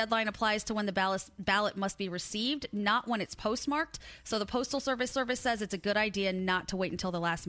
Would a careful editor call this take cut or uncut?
cut